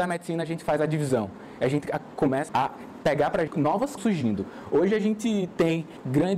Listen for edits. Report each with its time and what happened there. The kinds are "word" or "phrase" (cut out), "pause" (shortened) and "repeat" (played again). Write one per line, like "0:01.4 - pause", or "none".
0:02.5 - word
0:03.5 - word
0:04.0 - phrase